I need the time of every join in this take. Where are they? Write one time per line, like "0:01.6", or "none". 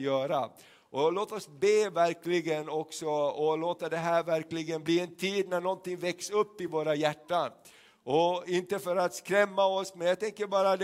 none